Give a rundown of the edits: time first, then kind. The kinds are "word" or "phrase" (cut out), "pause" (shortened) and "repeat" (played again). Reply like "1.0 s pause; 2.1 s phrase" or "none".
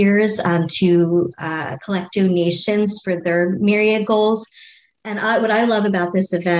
none